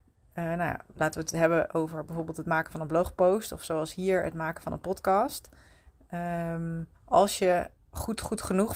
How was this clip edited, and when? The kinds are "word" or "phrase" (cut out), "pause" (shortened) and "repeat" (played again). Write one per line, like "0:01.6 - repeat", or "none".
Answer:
0:06.9 - pause
0:07.8 - pause